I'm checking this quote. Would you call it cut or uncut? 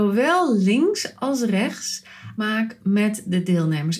cut